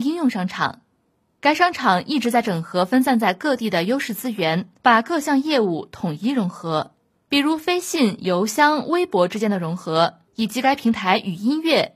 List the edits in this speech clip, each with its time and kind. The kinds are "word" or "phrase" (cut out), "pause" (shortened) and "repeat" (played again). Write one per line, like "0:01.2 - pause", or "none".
0:04.8 - pause
0:10.3 - pause